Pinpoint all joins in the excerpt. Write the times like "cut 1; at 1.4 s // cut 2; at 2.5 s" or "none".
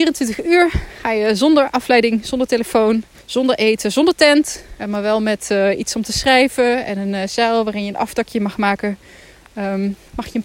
cut 1; at 3.2 s // cut 2; at 4.8 s